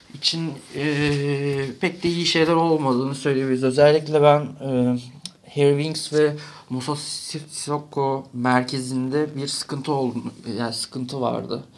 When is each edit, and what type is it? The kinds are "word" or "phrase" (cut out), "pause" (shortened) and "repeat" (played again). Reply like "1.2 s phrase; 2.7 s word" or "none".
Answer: none